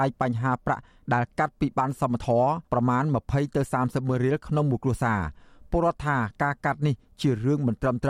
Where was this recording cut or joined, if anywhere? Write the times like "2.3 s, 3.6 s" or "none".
2.6 s

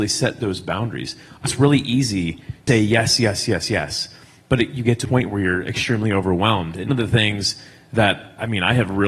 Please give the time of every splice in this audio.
1.4 s, 2.7 s, 3.5 s, 5.0 s, 6.9 s

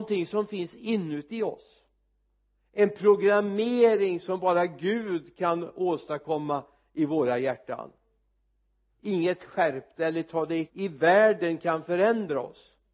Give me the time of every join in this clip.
10.7 s

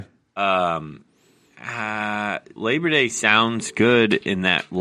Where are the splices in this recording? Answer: 2.6 s

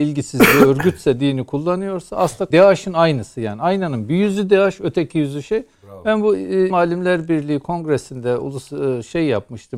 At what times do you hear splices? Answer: 2.5 s, 6.7 s

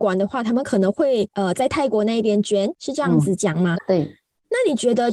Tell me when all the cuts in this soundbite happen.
3.7 s

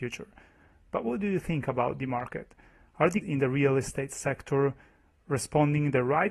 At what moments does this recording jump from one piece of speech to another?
3.2 s

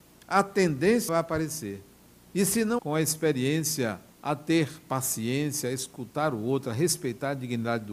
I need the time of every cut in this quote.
1.1 s, 2.1 s, 2.8 s, 4.1 s

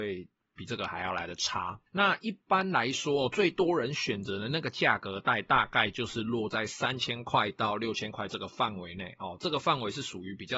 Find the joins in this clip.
1.9 s

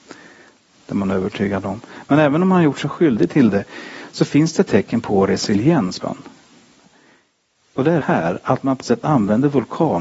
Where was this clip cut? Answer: 6.0 s, 8.0 s, 8.8 s

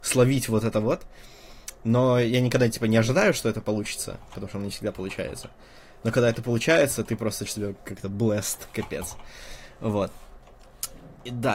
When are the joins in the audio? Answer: 7.5 s

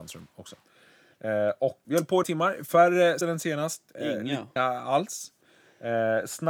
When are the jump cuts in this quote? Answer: 1.8 s, 2.2 s, 3.2 s, 4.6 s

